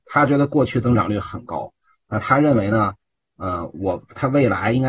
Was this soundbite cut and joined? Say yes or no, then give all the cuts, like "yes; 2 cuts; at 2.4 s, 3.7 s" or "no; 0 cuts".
no; 0 cuts